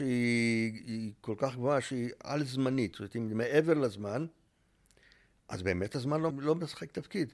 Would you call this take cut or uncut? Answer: cut